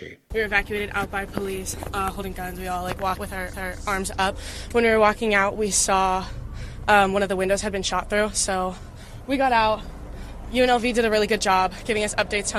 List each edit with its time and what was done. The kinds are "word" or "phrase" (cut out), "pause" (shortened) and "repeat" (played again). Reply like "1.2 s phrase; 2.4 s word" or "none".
3.2 s word; 3.5 s repeat